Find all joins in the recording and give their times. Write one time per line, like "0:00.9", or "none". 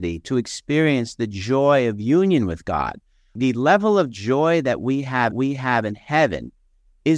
0:05.3